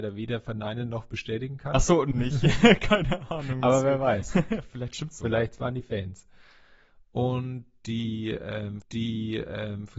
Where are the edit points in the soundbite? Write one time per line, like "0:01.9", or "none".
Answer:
0:02.1
0:08.8